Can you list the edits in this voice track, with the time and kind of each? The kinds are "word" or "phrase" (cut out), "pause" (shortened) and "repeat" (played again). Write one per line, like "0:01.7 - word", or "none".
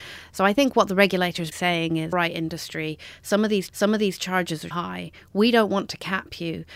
0:01.5 - word
0:02.1 - word
0:03.7 - repeat
0:04.7 - word